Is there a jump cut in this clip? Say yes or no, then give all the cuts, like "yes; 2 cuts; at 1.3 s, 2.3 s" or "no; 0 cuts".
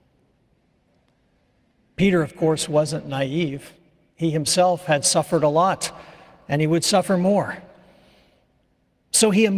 no; 0 cuts